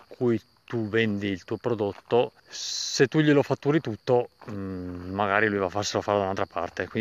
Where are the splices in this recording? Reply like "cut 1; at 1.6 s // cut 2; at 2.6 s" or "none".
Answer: cut 1; at 2.4 s